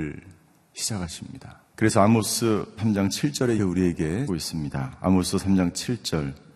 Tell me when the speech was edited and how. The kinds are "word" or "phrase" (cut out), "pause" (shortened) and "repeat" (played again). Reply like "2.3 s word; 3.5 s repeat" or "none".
1.7 s pause; 2.8 s phrase; 3.6 s word; 4.3 s word